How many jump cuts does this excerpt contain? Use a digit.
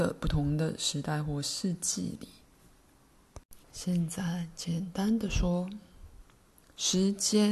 1